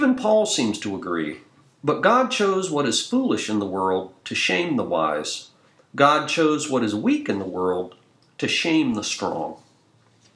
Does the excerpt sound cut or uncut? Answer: uncut